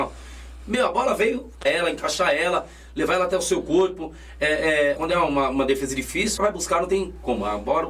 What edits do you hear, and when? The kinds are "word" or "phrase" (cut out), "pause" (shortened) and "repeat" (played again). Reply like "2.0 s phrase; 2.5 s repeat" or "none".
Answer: 1.6 s phrase; 5.0 s word; 6.4 s phrase